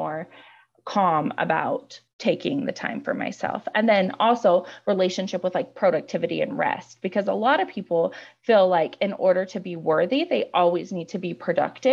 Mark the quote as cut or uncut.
cut